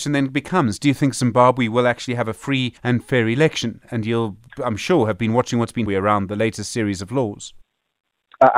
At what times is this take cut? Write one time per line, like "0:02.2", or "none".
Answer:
0:02.8
0:05.9